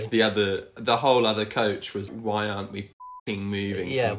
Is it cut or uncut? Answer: cut